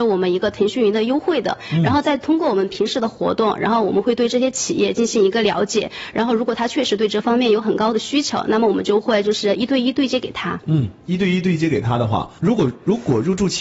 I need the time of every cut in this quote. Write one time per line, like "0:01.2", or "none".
0:11.0
0:12.4